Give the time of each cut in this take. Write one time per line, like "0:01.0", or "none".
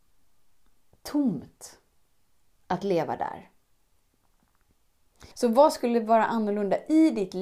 0:05.3